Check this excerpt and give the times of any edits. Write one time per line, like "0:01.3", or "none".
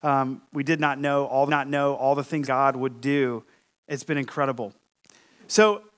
0:01.5
0:02.4